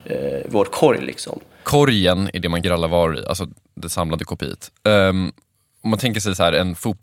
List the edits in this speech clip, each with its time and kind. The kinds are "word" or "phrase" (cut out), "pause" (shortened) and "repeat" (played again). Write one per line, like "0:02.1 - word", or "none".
0:02.6 - phrase